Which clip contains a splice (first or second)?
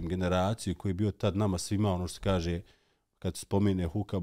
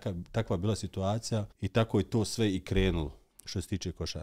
second